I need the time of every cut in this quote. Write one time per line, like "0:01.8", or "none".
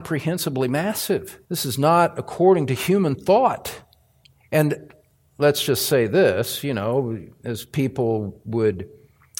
0:01.4
0:04.2